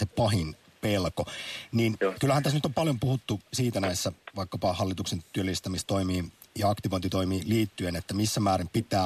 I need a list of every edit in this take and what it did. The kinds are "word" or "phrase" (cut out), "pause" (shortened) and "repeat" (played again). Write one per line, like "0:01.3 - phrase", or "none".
0:03.5 - pause